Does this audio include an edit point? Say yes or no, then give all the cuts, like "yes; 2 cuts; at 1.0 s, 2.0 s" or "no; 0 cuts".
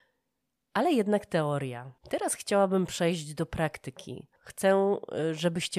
yes; 2 cuts; at 2.0 s, 4.4 s